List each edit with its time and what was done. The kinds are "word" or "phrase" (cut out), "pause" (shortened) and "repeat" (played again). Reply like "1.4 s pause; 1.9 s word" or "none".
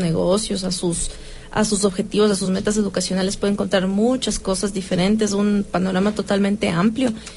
none